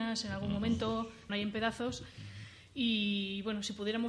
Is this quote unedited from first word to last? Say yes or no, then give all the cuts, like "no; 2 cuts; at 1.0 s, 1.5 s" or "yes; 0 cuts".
no; 1 cut; at 1.3 s